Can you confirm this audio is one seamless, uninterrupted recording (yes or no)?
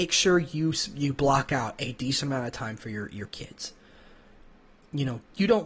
yes